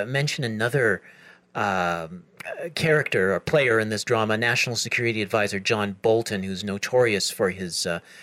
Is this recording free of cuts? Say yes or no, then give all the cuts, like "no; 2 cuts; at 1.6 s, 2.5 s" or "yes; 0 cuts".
yes; 0 cuts